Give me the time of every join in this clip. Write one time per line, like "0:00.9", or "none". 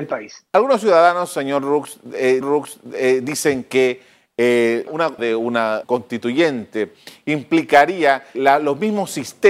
0:02.4
0:04.9
0:05.2
0:05.8
0:08.3